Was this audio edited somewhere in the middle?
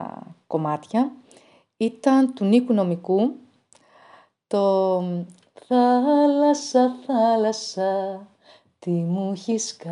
no; 0 cuts

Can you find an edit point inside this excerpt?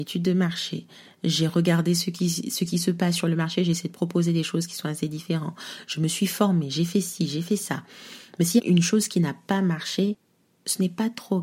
no; 0 cuts

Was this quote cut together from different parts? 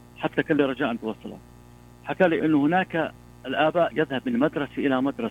yes; 2 cuts; at 2.4 s, 3.9 s

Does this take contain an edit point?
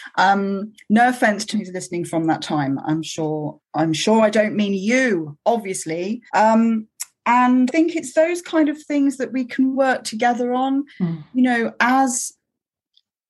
yes; 5 cuts; at 1.5 s, 6.3 s, 7.7 s, 9.7 s, 10.9 s

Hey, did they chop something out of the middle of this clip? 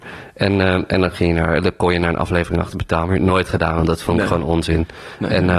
no; 0 cuts

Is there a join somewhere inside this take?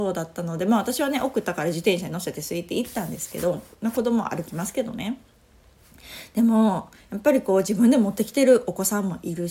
no; 0 cuts

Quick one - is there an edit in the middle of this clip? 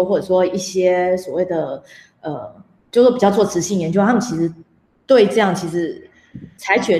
no; 0 cuts

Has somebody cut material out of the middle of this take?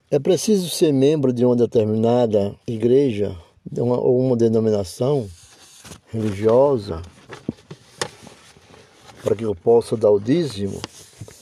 yes; 2 cuts; at 2.6 s, 6.0 s

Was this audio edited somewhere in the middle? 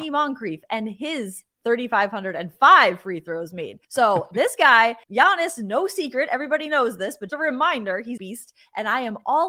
yes; 4 cuts; at 3.8 s, 5.0 s, 7.3 s, 8.2 s

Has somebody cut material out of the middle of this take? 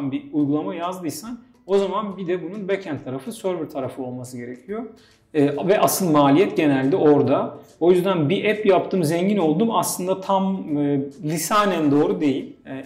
no; 0 cuts

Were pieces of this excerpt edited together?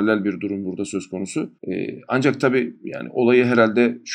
yes; 1 cut; at 1.6 s

